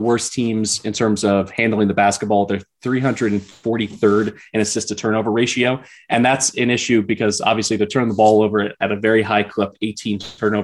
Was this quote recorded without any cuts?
yes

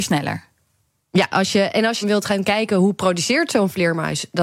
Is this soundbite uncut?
no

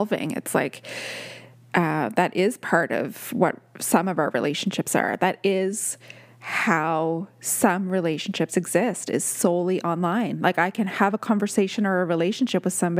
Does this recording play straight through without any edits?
yes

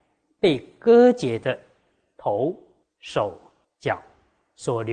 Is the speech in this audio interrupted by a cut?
no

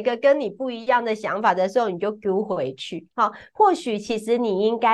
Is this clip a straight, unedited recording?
no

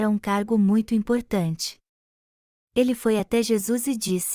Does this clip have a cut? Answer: no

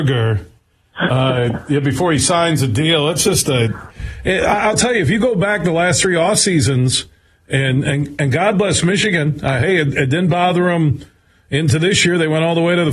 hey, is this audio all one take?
yes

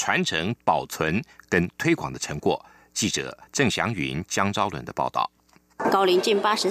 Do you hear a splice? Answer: yes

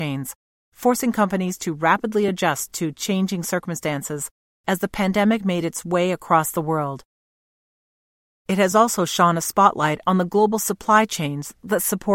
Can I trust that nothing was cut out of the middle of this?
yes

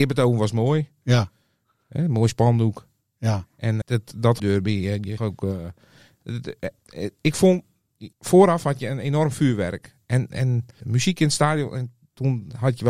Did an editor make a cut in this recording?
yes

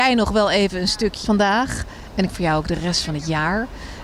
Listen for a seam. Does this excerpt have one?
yes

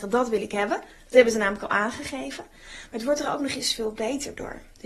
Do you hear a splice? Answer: no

